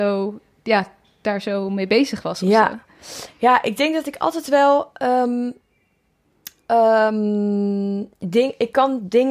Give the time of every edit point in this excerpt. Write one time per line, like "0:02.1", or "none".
none